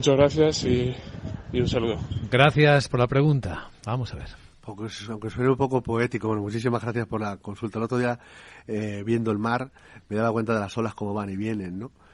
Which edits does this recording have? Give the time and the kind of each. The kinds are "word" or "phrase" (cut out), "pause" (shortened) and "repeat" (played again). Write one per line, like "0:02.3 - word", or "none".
none